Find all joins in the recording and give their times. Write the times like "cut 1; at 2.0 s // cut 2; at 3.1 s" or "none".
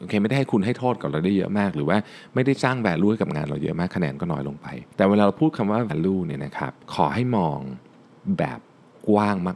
cut 1; at 4.9 s // cut 2; at 5.9 s // cut 3; at 6.8 s